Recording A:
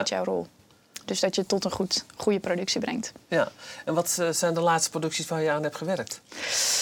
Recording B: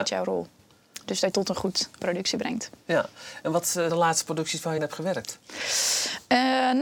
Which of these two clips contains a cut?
B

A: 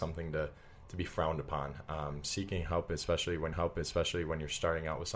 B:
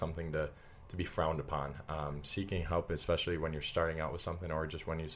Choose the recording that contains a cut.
A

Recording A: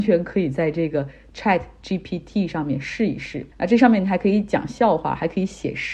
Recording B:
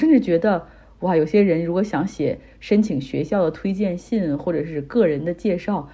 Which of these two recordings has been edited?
A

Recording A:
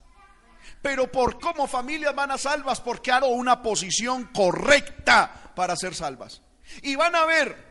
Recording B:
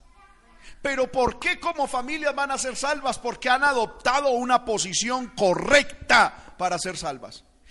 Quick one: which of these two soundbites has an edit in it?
A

